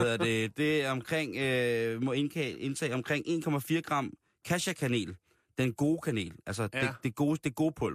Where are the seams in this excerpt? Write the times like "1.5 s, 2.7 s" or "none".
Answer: none